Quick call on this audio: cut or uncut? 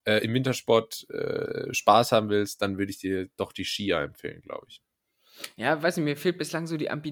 uncut